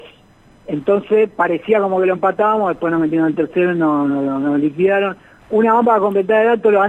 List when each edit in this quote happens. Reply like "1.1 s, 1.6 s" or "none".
none